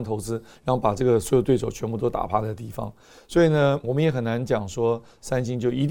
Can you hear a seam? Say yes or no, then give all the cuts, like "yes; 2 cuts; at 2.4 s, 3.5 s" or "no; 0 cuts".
yes; 1 cut; at 3.8 s